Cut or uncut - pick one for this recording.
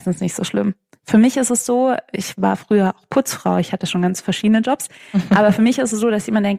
uncut